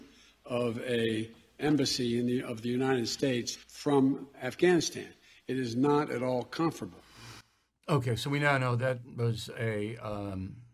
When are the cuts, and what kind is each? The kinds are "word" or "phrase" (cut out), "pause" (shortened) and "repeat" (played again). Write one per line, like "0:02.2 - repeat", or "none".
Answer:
0:03.6 - pause